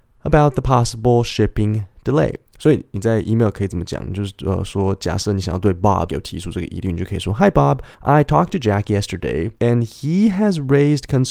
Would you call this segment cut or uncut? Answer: cut